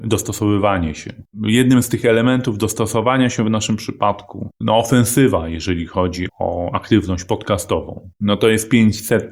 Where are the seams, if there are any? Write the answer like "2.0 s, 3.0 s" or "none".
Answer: 1.3 s, 4.5 s, 6.3 s, 8.1 s

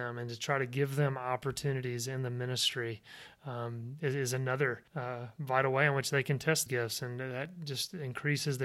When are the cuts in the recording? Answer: 4.9 s, 6.7 s

